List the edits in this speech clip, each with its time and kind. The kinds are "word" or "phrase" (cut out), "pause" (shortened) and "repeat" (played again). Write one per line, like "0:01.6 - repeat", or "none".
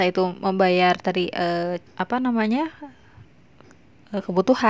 0:01.8 - pause